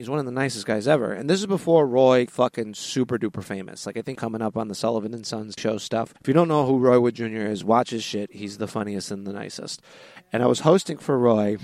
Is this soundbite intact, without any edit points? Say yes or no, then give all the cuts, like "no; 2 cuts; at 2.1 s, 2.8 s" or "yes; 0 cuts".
no; 4 cuts; at 2.3 s, 4.2 s, 5.6 s, 6.2 s